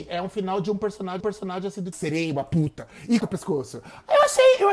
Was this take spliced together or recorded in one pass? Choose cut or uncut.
cut